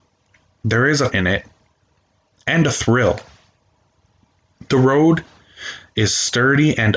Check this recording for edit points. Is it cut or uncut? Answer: cut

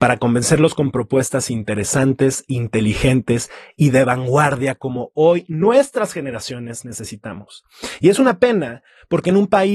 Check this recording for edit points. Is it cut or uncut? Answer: uncut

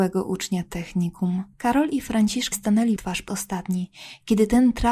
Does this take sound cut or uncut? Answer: cut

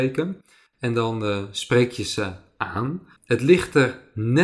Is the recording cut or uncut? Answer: cut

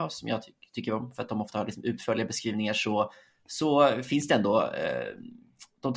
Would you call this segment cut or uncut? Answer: uncut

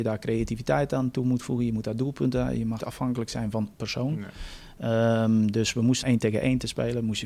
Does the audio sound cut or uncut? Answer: cut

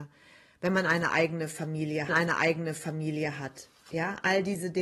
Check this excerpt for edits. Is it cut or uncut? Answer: cut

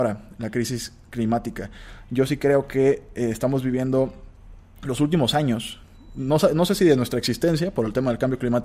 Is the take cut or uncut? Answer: uncut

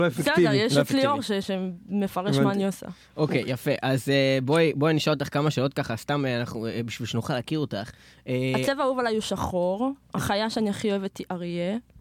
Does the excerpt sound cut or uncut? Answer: uncut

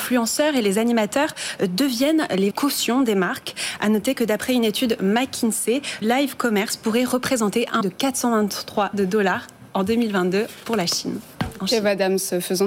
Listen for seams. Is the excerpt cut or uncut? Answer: cut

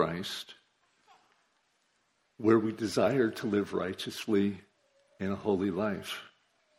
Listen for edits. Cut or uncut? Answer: uncut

